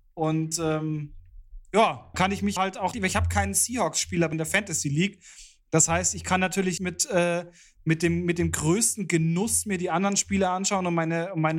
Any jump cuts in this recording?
yes; 5 cuts; at 2.1 s, 2.6 s, 2.9 s, 4.3 s, 6.8 s

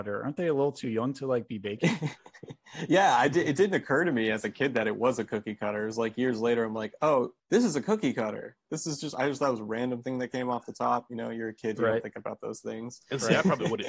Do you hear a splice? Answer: no; 0 cuts

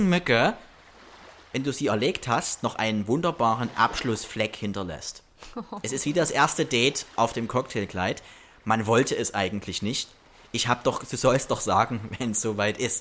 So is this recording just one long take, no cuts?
yes; 0 cuts

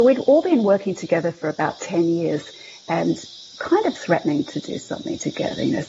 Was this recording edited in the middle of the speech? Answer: no; 0 cuts

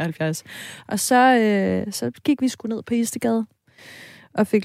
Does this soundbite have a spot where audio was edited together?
no; 0 cuts

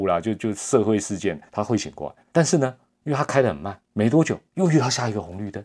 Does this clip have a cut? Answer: yes; 4 cuts; at 1.5 s, 2.3 s, 2.9 s, 3.8 s

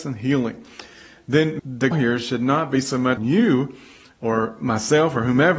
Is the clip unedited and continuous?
no; 3 cuts; at 1.6 s, 1.9 s, 3.2 s

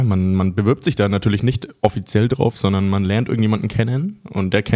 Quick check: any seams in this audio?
no; 0 cuts

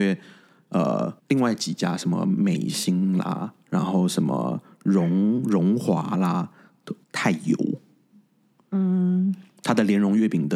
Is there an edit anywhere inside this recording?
yes; 2 cuts; at 1.2 s, 7.0 s

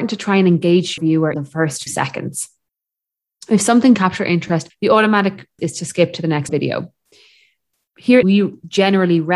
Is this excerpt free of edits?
no; 8 cuts; at 1.0 s, 1.3 s, 1.9 s, 3.9 s, 4.7 s, 5.6 s, 6.5 s, 8.2 s

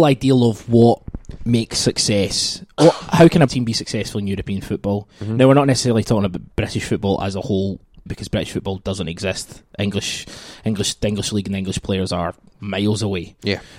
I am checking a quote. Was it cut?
yes; 4 cuts; at 3.5 s, 6.5 s, 8.1 s, 12.5 s

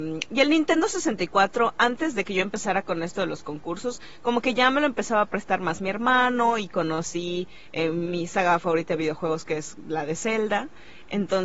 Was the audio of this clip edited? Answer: no; 0 cuts

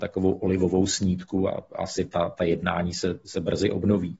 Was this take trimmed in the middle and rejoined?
no; 0 cuts

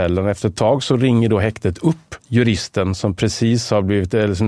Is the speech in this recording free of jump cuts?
no; 1 cut; at 2.2 s

